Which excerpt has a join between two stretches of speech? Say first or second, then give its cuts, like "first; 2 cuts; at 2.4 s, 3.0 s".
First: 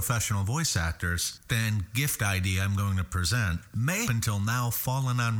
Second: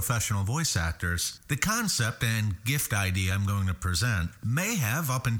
first; 2 cuts; at 1.5 s, 4.0 s